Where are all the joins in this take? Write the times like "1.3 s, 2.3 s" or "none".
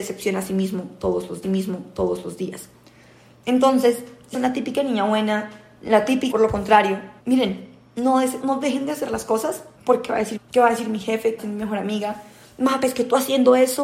1.4 s, 4.3 s, 6.3 s, 7.2 s, 8.4 s, 9.8 s, 10.4 s, 11.4 s